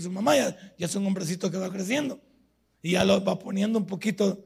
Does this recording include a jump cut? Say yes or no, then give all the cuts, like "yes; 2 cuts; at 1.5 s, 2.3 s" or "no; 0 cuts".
no; 0 cuts